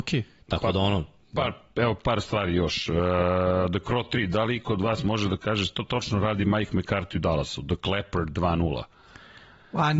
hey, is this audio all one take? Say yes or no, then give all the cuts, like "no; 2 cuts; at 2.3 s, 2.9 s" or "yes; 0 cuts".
yes; 0 cuts